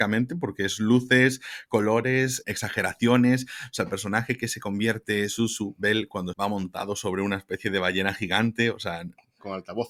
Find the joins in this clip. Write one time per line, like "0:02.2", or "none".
0:02.4
0:06.3